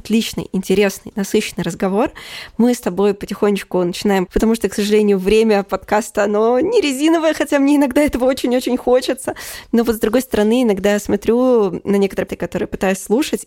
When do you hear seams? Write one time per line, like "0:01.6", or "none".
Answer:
0:04.3
0:12.3